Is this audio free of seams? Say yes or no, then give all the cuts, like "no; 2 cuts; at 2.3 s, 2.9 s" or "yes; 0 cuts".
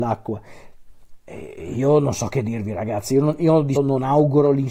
no; 1 cut; at 3.8 s